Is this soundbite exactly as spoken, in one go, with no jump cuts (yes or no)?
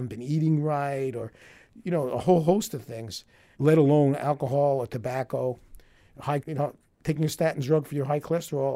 no